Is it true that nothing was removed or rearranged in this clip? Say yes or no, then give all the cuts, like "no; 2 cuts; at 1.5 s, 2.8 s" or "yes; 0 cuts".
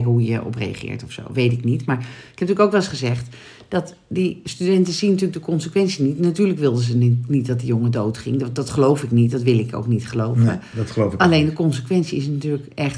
yes; 0 cuts